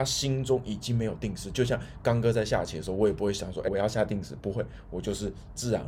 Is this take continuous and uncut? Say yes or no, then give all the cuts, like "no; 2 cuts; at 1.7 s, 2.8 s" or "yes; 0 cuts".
no; 1 cut; at 3.7 s